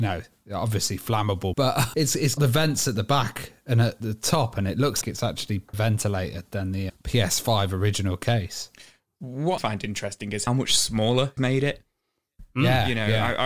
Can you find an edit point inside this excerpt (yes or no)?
yes